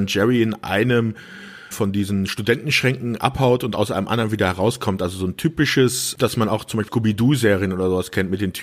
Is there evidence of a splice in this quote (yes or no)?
yes